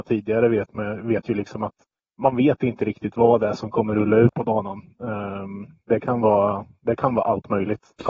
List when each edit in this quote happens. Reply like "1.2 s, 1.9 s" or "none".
2.0 s